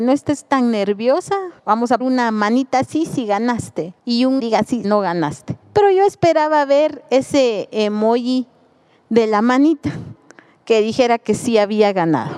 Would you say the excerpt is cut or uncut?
cut